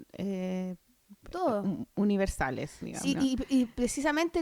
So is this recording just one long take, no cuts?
no; 1 cut; at 3.0 s

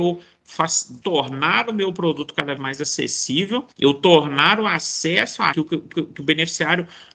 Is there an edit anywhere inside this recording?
yes; 5 cuts; at 1.0 s, 2.6 s, 3.7 s, 5.5 s, 5.9 s

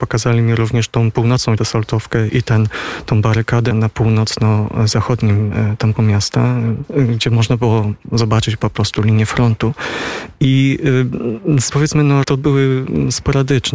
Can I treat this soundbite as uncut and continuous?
no; 6 cuts; at 1.6 s, 2.3 s, 3.7 s, 5.9 s, 11.7 s, 12.2 s

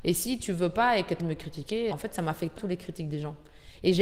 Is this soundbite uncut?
no; 3 cuts; at 1.2 s, 1.9 s, 2.6 s

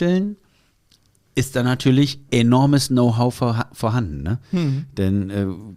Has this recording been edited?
no; 0 cuts

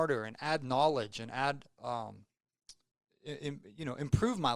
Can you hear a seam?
no; 0 cuts

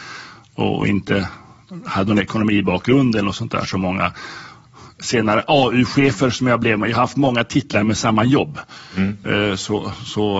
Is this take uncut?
yes; 0 cuts

